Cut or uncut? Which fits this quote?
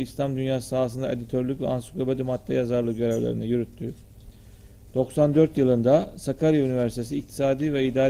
uncut